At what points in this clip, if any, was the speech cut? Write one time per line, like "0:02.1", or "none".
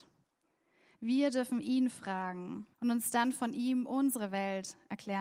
0:02.7

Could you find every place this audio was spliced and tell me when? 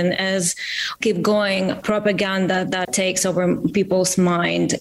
0:01.0
0:02.8

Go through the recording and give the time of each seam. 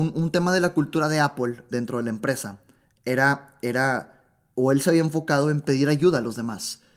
0:01.7

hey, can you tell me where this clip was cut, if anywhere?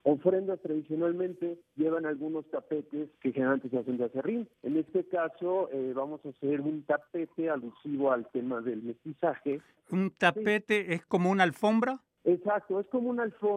0:01.6
0:03.1
0:04.5

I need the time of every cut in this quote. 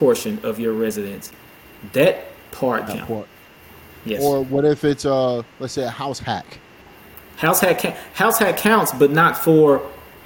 0:02.9

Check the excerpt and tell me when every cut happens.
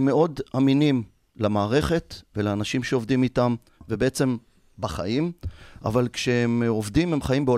none

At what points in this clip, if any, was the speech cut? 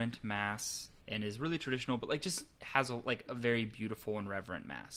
0:01.0

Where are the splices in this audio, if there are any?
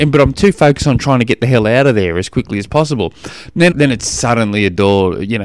0:03.7

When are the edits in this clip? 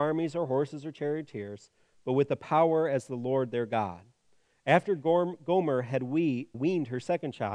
0:06.5

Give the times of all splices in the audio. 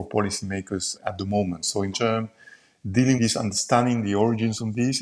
0:01.0
0:01.9
0:03.2

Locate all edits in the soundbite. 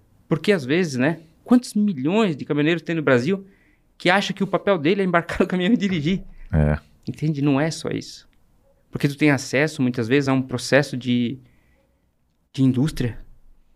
none

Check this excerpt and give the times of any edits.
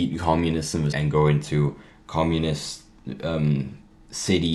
0:00.9

